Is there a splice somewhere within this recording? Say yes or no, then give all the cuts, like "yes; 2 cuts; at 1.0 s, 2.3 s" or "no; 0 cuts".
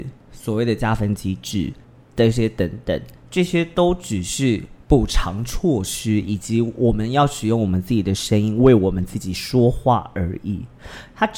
yes; 2 cuts; at 1.8 s, 3.2 s